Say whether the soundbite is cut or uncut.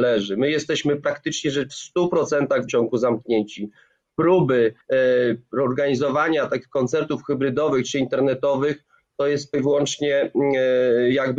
cut